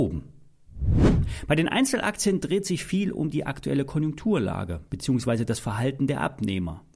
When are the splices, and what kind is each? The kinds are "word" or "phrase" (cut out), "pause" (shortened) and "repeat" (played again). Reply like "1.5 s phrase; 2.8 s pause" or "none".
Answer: none